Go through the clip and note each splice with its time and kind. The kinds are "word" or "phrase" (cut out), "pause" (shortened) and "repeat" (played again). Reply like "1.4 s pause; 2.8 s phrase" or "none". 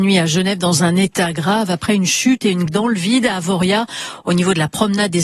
2.7 s word